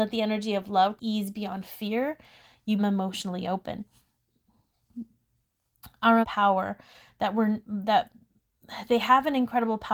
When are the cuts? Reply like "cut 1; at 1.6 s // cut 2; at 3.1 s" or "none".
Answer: cut 1; at 1.0 s // cut 2; at 2.8 s // cut 3; at 6.2 s